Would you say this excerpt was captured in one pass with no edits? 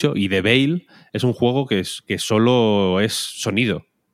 yes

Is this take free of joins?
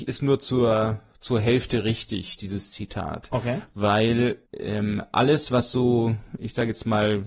no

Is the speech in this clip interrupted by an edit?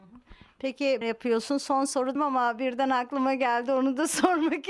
yes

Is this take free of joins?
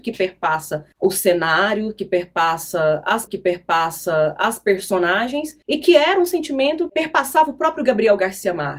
no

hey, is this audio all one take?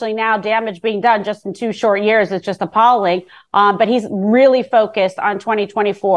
yes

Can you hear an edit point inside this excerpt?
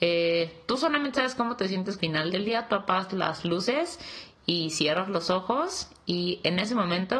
yes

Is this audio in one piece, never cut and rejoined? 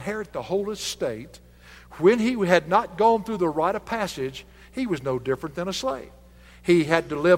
yes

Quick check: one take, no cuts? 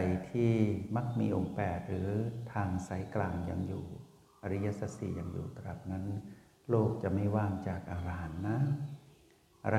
yes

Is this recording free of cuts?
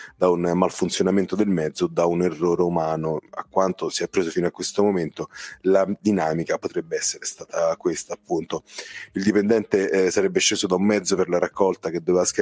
yes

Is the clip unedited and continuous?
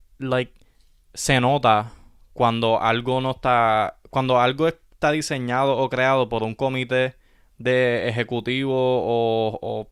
yes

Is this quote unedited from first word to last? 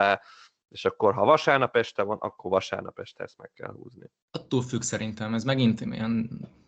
yes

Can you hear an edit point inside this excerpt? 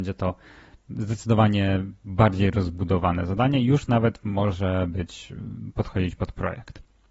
no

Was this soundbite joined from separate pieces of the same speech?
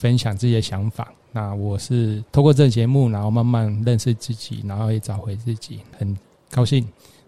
yes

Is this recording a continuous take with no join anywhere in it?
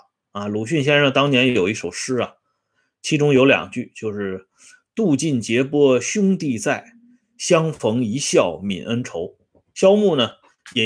yes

